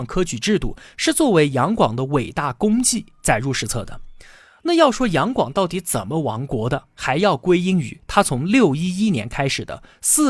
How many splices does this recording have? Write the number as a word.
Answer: zero